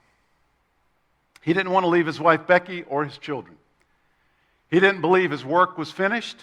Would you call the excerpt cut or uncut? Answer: uncut